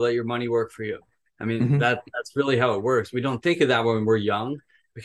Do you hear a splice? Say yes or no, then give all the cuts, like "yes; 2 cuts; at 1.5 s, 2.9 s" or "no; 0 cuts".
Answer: no; 0 cuts